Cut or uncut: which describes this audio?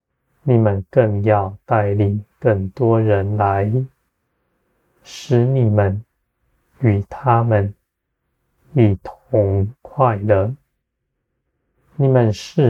uncut